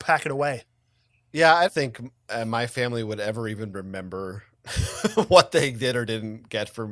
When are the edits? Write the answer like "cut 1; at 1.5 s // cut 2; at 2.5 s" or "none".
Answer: cut 1; at 1.7 s